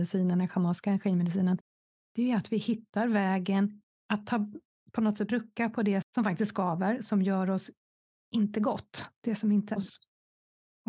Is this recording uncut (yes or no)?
no